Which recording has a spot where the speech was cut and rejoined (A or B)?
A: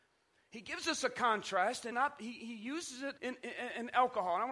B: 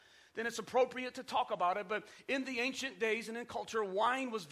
A